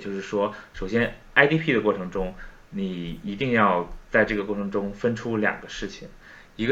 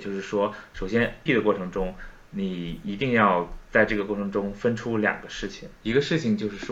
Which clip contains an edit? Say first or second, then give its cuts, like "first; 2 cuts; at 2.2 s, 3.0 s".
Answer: second; 2 cuts; at 1.3 s, 5.7 s